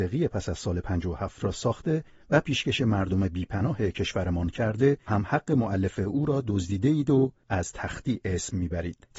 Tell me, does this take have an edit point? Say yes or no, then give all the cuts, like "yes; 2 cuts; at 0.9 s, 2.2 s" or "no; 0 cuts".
no; 0 cuts